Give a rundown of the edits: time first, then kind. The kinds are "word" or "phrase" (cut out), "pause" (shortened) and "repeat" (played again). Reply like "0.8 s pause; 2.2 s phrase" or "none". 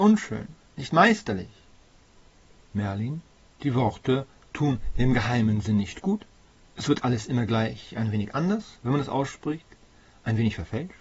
none